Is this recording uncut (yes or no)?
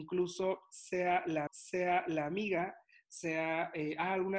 no